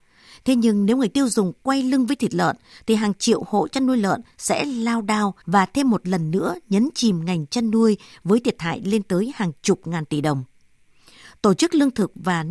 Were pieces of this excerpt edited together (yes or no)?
yes